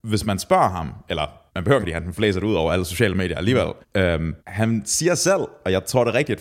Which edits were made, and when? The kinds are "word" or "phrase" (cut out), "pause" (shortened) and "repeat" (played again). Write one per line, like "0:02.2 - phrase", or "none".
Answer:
0:01.5 - pause
0:01.8 - phrase
0:02.1 - word
0:03.8 - pause
0:04.4 - pause